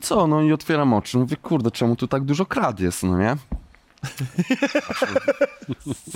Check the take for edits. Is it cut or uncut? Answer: uncut